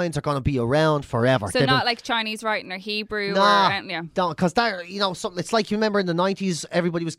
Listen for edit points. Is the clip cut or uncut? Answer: uncut